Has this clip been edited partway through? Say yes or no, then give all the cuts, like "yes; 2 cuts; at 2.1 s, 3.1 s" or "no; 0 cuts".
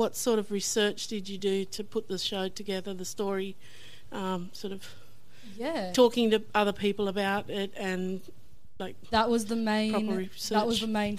no; 0 cuts